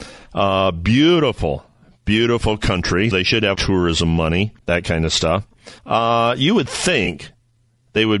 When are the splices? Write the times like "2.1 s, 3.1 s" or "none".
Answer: 3.1 s, 3.5 s, 4.6 s, 5.8 s